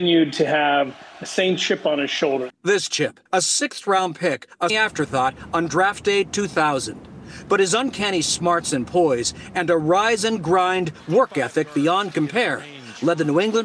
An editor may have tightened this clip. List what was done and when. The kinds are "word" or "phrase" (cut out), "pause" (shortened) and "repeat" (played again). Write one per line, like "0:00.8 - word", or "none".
0:02.5 - pause
0:03.3 - pause
0:04.7 - word